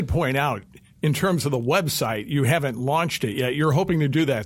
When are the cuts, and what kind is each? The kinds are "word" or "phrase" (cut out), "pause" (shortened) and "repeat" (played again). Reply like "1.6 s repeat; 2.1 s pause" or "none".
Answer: none